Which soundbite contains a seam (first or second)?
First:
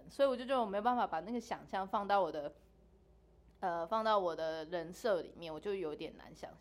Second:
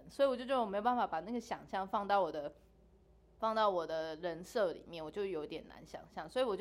second